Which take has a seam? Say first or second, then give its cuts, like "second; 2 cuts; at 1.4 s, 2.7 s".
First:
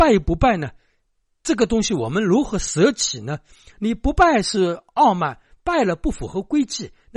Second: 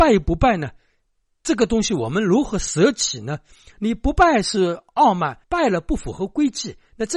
second; 1 cut; at 5.4 s